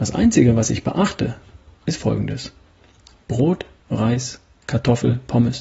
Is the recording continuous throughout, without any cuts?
no; 1 cut; at 3.8 s

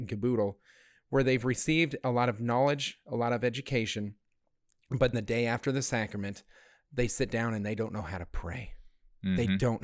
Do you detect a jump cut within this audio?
yes; 1 cut; at 5.1 s

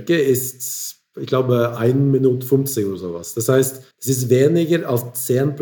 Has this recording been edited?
yes; 1 cut; at 3.9 s

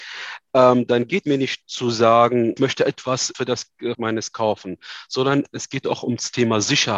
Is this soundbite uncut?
no; 6 cuts; at 1.2 s, 1.6 s, 2.6 s, 3.3 s, 3.9 s, 4.3 s

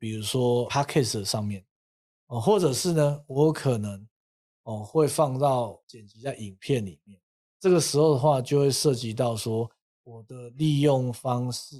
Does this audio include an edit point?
no; 0 cuts

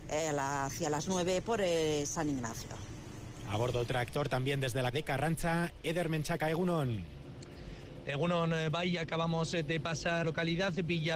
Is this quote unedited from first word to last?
no; 3 cuts; at 3.9 s, 4.9 s, 10.2 s

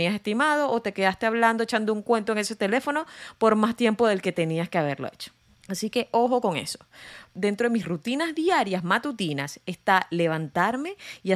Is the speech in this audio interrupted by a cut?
yes; 1 cut; at 5.4 s

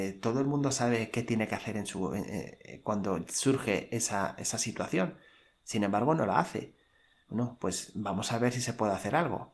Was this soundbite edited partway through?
no; 0 cuts

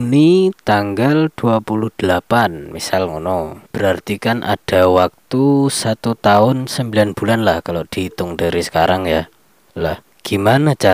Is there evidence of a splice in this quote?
yes; 1 cut; at 3.7 s

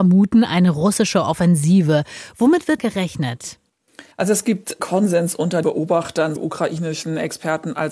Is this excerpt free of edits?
no; 5 cuts; at 2.8 s, 4.1 s, 4.8 s, 5.6 s, 6.4 s

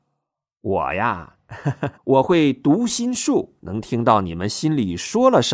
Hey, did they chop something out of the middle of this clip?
yes; 2 cuts; at 2.0 s, 3.6 s

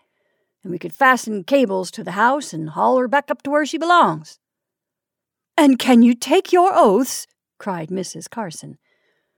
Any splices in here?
no; 0 cuts

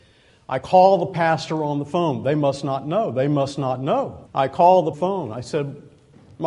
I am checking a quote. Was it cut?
yes; 2 cuts; at 4.3 s, 4.9 s

